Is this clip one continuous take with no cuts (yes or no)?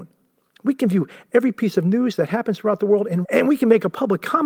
no